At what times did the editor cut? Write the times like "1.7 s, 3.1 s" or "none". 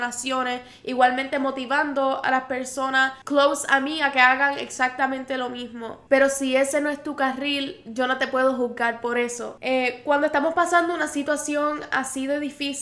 none